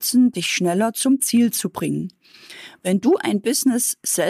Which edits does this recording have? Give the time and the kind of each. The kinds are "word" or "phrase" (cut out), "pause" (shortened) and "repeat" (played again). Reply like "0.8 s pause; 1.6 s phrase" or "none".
none